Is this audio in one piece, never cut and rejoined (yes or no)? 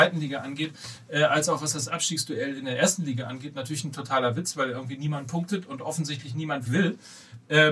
no